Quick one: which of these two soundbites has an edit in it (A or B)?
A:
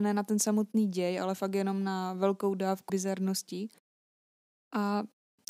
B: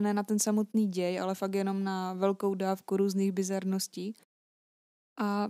A